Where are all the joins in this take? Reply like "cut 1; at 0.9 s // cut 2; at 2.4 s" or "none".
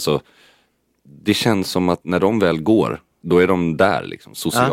cut 1; at 3.2 s